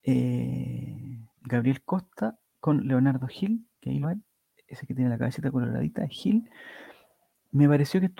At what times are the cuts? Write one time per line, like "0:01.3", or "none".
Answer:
0:01.3
0:03.7
0:04.0